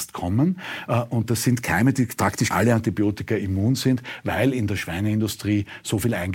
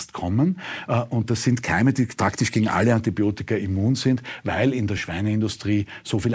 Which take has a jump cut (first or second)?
first